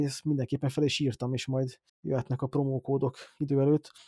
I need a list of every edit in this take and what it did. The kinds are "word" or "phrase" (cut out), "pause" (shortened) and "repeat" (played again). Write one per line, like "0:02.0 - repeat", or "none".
0:01.9 - pause